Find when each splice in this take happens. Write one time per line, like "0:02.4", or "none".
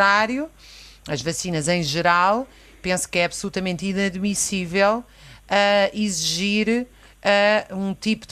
none